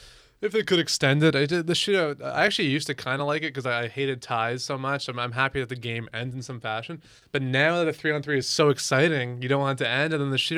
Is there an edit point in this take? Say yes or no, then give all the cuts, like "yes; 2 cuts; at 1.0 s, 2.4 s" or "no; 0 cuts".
no; 0 cuts